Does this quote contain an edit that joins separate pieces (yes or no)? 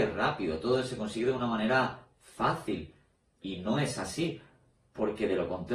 no